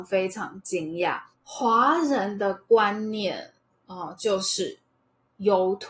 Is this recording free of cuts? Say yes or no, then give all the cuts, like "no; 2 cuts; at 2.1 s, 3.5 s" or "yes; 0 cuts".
no; 1 cut; at 1.3 s